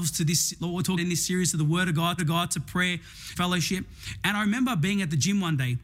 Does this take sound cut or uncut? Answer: cut